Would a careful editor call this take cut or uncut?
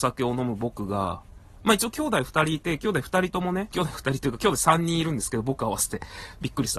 cut